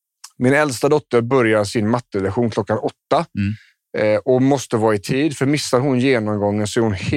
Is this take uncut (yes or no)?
yes